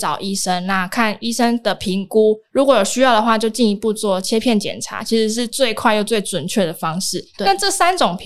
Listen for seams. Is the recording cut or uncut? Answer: cut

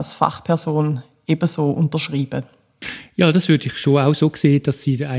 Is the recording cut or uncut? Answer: uncut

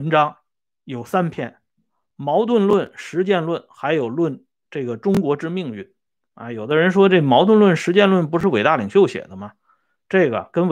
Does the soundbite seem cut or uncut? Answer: uncut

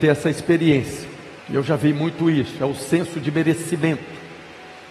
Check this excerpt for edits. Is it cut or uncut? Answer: cut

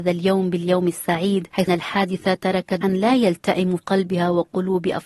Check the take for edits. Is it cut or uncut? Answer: cut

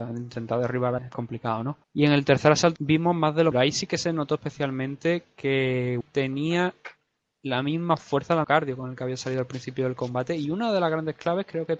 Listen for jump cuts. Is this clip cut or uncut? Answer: cut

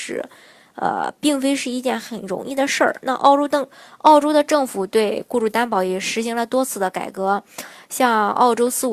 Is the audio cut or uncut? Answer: uncut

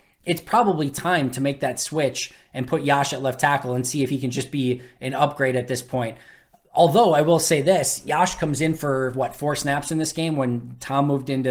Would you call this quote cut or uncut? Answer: uncut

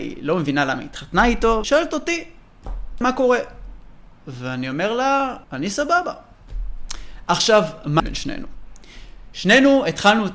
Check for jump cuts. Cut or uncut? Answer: cut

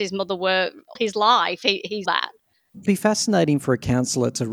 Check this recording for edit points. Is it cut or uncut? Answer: cut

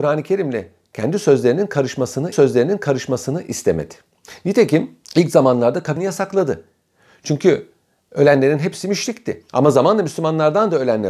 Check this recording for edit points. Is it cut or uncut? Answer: cut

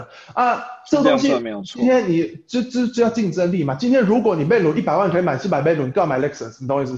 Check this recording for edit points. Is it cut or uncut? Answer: uncut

